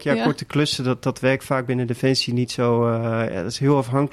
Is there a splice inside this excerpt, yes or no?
no